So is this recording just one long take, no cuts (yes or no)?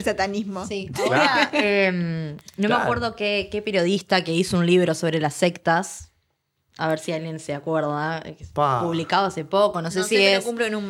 yes